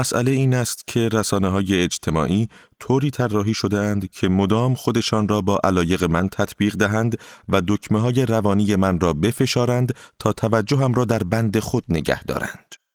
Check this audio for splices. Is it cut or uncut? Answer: uncut